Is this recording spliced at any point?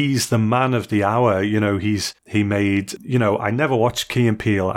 yes; 2 cuts; at 2.2 s, 3.0 s

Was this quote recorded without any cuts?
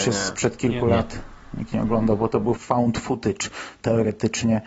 no; 1 cut; at 2.6 s

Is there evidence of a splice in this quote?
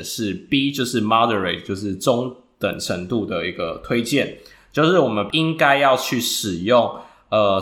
yes; 1 cut; at 5.3 s

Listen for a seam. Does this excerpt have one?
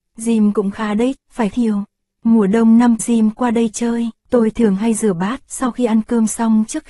yes; 4 cuts; at 1.2 s, 1.5 s, 3.0 s, 4.2 s

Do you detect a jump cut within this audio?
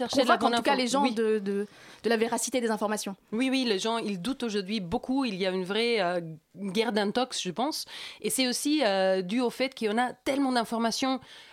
no; 0 cuts

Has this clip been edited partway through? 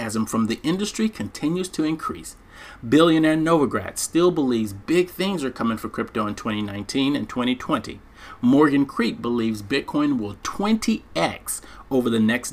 no; 0 cuts

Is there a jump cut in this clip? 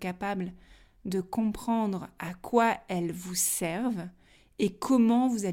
no; 0 cuts

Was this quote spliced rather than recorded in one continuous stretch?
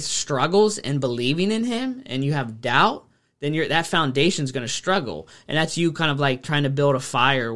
no; 0 cuts

